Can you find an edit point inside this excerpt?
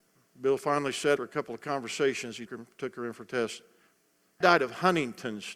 yes; 3 cuts; at 1.2 s, 2.5 s, 4.4 s

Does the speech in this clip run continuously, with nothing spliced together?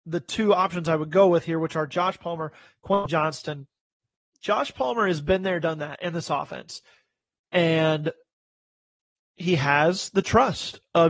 yes; 0 cuts

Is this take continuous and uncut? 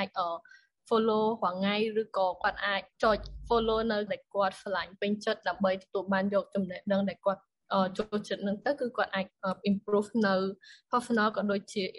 no; 2 cuts; at 2.9 s, 4.1 s

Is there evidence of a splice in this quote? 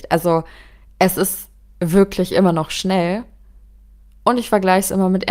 no; 0 cuts

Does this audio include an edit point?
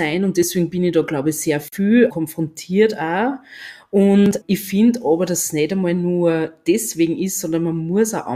yes; 2 cuts; at 2.1 s, 4.4 s

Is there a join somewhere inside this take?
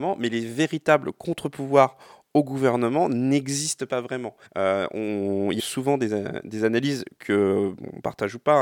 yes; 2 cuts; at 4.5 s, 5.6 s

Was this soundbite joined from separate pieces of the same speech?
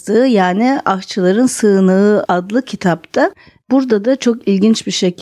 no; 0 cuts

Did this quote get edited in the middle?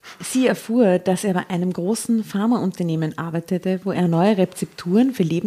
no; 0 cuts

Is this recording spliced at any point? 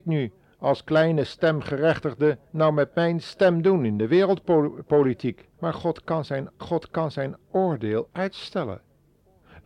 yes; 3 cuts; at 2.5 s, 5.5 s, 6.6 s

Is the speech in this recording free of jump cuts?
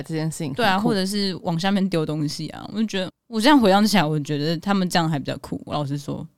no; 1 cut; at 3.1 s

